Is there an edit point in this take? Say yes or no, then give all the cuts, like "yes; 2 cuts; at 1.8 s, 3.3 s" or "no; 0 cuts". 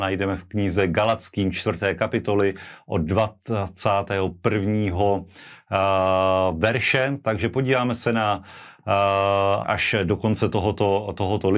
yes; 1 cut; at 9.6 s